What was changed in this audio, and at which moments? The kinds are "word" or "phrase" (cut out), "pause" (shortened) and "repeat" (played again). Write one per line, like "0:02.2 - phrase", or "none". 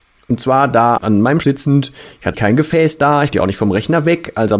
0:01.0 - word
0:01.4 - word
0:02.3 - word
0:03.3 - word